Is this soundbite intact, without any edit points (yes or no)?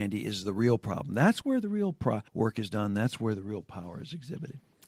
no